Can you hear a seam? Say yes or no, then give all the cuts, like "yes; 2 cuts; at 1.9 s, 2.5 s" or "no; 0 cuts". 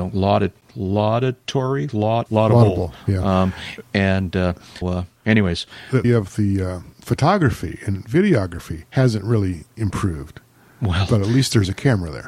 yes; 6 cuts; at 2.3 s, 4.8 s, 5.2 s, 6.0 s, 6.9 s, 8.9 s